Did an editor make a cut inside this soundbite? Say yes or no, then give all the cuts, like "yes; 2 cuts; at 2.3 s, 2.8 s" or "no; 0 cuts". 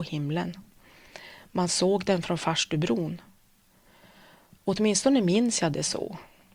no; 0 cuts